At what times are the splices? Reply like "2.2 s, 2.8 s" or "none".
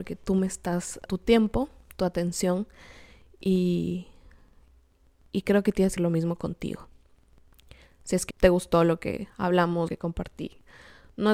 1.1 s, 6.0 s, 8.3 s, 9.9 s